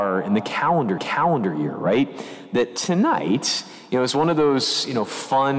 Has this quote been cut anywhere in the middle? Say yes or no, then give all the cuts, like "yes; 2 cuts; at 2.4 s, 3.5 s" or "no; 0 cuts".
yes; 1 cut; at 1.0 s